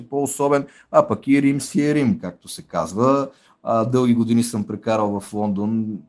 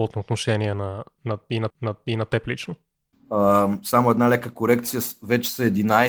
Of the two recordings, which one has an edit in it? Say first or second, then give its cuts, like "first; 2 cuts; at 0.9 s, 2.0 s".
second; 2 cuts; at 1.7 s, 3.1 s